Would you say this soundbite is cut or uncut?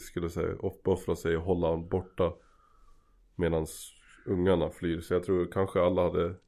uncut